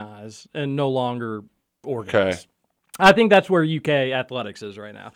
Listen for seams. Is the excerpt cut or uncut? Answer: uncut